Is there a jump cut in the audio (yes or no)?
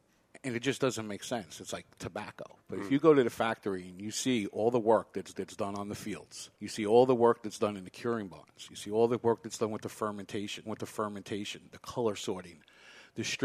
yes